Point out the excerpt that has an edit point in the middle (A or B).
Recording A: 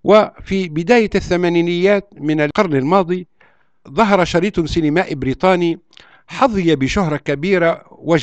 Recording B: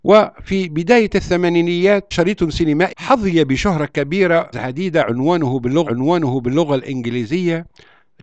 B